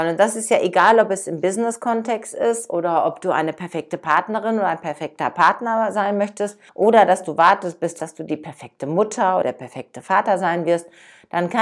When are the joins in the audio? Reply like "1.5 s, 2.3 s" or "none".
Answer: 6.7 s, 8.0 s, 9.4 s